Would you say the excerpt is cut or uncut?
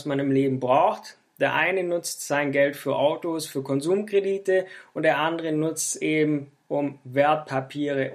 uncut